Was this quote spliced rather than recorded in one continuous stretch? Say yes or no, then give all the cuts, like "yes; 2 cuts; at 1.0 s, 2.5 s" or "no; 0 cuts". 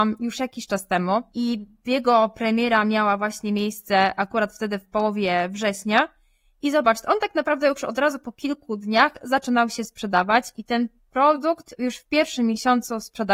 no; 0 cuts